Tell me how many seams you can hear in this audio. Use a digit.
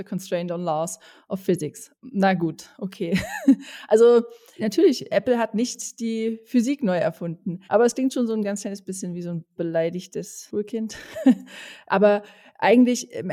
2